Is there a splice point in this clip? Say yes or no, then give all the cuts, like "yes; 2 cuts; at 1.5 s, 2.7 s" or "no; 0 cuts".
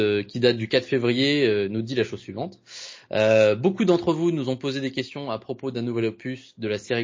no; 0 cuts